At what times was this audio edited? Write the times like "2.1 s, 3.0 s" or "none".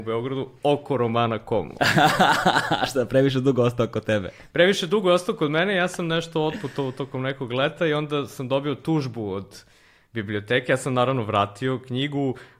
none

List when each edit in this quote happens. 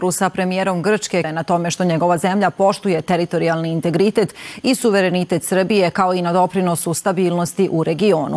1.2 s

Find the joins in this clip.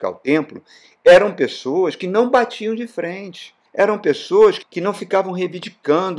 3.7 s, 4.6 s

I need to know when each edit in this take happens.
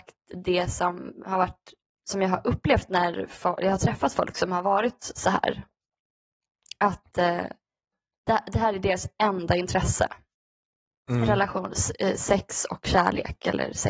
none

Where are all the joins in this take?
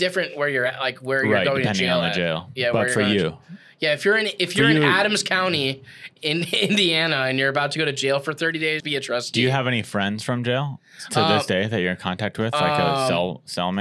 8.8 s

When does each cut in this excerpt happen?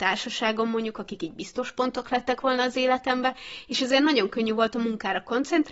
none

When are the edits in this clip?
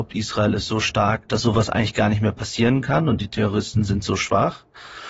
1.2 s

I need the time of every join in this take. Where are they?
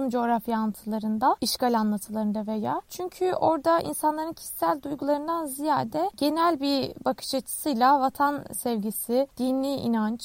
none

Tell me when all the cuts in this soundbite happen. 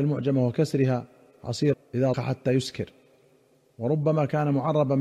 1.7 s, 2.1 s

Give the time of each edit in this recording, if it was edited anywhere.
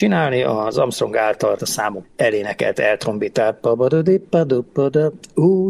1.6 s, 2.0 s

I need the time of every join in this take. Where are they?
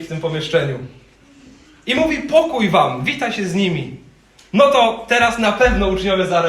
none

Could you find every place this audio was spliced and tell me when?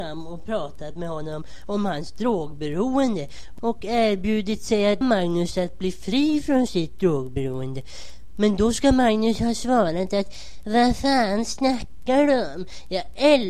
5.0 s

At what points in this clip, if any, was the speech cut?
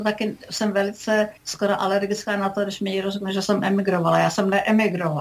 1.4 s

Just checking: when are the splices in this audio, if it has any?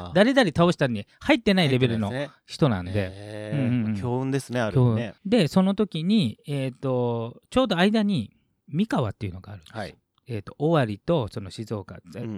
5.2 s

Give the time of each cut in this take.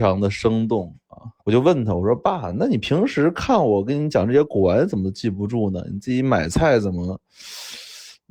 1.4 s

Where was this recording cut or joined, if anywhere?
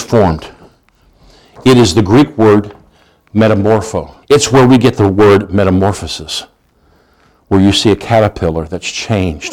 4.2 s

